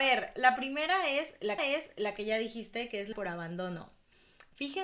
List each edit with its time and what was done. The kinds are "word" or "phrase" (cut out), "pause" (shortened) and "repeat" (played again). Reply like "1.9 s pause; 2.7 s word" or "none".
1.6 s repeat; 3.1 s word